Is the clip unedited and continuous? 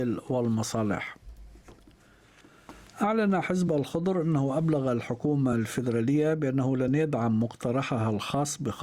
yes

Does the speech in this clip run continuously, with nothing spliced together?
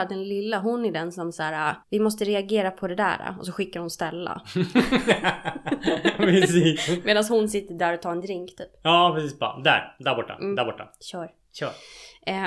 no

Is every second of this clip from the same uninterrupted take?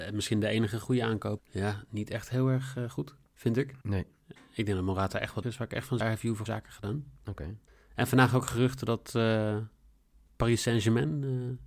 no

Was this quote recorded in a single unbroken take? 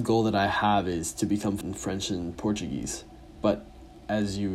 no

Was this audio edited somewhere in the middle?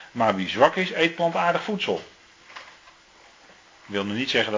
no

